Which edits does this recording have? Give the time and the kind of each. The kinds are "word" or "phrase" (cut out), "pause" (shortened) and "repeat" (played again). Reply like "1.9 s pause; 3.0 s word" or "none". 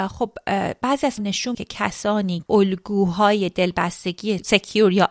1.2 s word; 1.5 s word; 2.5 s word